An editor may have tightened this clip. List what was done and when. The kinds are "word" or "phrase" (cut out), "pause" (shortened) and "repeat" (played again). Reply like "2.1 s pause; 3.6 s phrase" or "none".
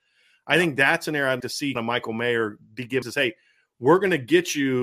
1.4 s word; 1.8 s word; 3.0 s word